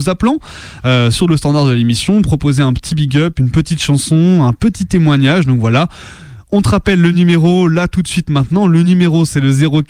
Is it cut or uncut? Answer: uncut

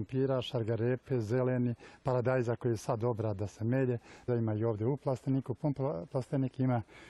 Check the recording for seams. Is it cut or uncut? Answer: cut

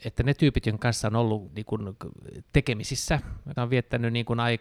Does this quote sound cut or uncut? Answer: cut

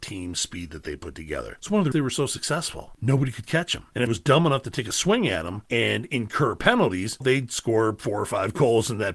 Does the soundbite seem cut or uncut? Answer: cut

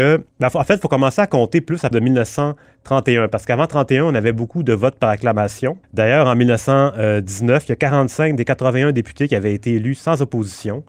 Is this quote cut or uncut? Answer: cut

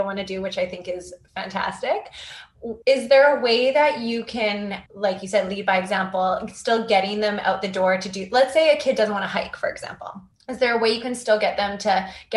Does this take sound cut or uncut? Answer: cut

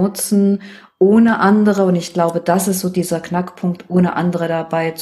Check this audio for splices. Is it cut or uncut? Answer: uncut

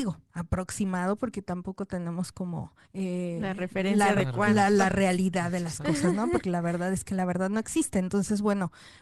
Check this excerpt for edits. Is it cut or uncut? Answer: cut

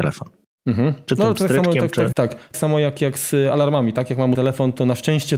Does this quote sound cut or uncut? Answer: cut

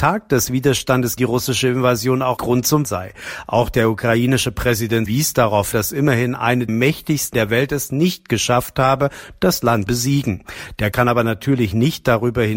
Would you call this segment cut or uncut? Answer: cut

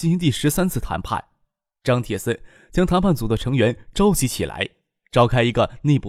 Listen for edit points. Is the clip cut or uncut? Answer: uncut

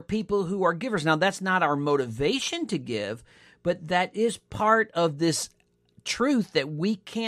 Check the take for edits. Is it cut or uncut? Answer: uncut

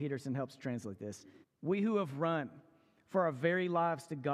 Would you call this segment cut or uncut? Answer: cut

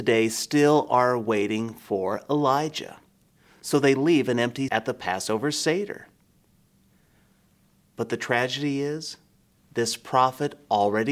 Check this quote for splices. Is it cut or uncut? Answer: cut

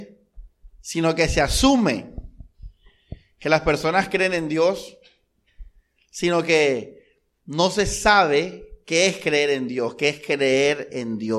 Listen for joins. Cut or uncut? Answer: uncut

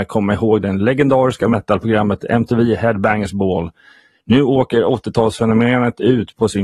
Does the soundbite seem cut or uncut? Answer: uncut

